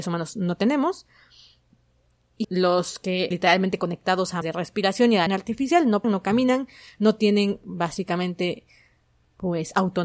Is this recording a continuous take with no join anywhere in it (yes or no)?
no